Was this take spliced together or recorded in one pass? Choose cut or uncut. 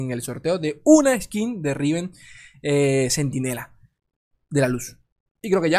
uncut